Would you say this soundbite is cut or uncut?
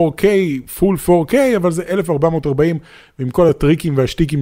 uncut